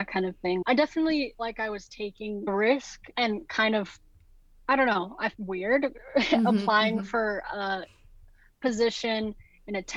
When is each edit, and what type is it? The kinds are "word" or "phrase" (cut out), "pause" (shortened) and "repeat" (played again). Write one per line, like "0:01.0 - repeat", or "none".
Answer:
0:01.4 - word
0:05.3 - word